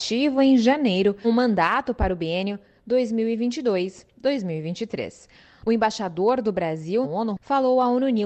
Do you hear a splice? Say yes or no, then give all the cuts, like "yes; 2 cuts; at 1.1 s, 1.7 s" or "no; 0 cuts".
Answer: yes; 2 cuts; at 1.2 s, 7.0 s